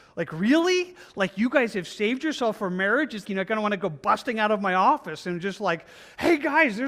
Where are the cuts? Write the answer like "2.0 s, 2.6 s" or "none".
3.2 s